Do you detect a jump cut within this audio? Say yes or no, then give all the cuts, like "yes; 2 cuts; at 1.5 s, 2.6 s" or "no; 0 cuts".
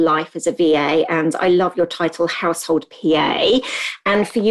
no; 0 cuts